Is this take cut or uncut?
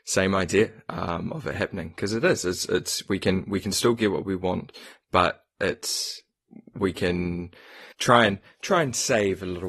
cut